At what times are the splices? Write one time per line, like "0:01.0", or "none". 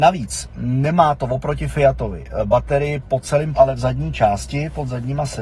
0:03.5